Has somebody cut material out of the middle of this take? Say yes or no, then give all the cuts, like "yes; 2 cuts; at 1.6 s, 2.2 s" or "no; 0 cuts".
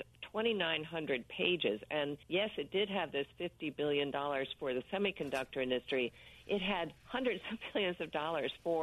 yes; 2 cuts; at 2.2 s, 7.0 s